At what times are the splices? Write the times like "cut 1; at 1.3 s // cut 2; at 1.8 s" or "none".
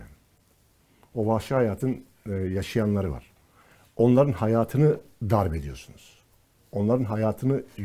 none